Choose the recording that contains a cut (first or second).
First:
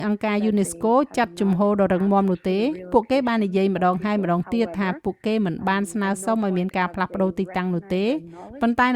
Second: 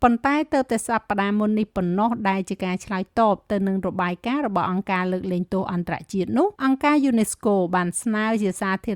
second